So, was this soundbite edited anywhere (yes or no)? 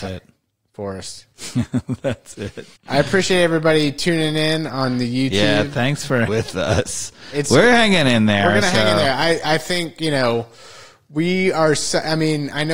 yes